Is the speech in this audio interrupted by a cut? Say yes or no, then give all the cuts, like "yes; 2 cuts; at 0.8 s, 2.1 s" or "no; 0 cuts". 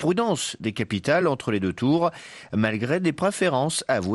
no; 0 cuts